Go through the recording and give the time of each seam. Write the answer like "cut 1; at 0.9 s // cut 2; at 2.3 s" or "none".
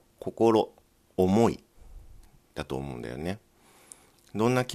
none